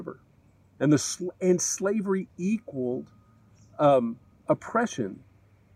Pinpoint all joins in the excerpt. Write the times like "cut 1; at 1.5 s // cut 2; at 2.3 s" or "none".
none